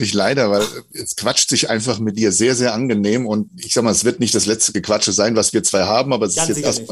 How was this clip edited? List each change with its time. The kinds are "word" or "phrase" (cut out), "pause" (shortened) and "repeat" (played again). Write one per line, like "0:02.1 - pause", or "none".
0:03.5 - word